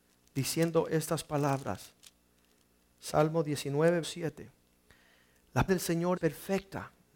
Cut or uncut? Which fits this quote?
cut